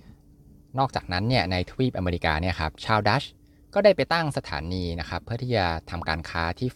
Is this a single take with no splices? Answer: yes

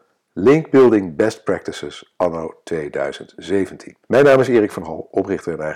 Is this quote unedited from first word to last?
no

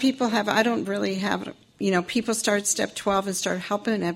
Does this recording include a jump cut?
no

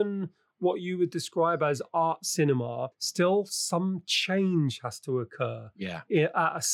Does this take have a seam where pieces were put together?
yes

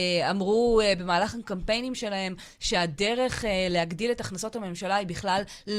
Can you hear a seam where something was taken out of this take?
no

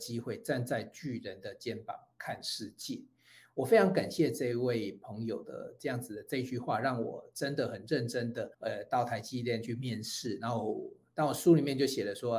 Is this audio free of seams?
no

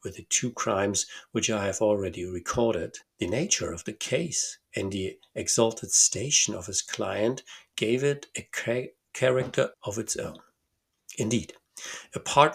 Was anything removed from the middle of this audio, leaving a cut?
yes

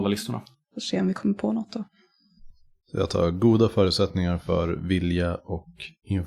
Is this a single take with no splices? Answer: yes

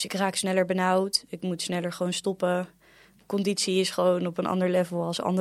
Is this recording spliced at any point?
no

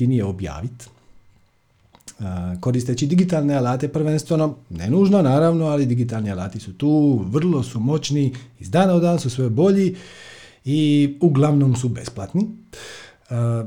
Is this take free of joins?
yes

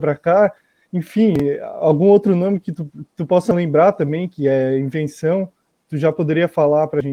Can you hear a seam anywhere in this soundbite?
no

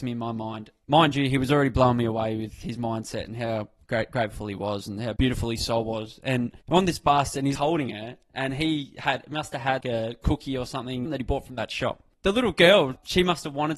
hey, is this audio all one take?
no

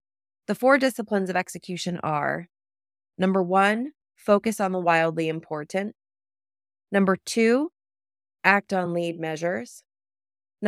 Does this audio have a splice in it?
no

